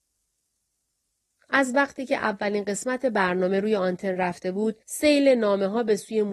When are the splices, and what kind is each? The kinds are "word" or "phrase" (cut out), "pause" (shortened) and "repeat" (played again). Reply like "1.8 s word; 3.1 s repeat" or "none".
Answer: 4.8 s pause